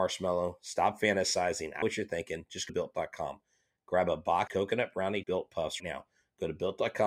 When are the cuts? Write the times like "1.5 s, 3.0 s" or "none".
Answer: 1.8 s, 2.7 s, 4.5 s, 5.2 s, 5.8 s